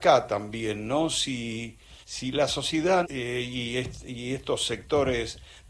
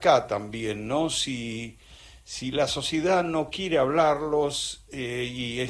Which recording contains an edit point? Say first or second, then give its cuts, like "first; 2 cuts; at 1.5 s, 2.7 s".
first; 2 cuts; at 2.0 s, 3.0 s